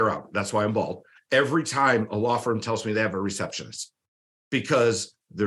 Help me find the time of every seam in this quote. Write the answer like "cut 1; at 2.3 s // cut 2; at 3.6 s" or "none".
none